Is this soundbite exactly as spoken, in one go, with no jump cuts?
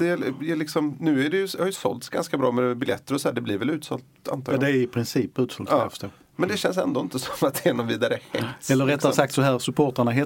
yes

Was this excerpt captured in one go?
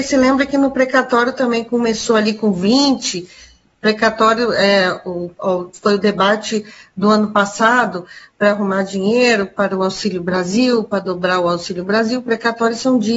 yes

